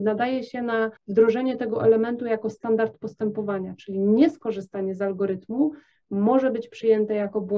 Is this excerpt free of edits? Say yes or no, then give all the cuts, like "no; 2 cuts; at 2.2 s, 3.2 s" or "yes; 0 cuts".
no; 1 cut; at 1.0 s